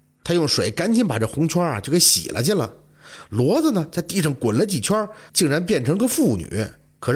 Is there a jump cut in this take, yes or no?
yes